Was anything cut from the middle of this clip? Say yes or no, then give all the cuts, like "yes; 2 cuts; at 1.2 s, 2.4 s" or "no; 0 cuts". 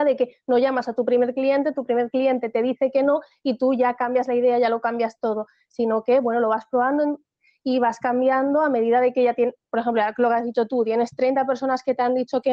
no; 0 cuts